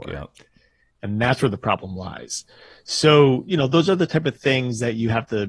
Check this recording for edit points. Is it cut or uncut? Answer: uncut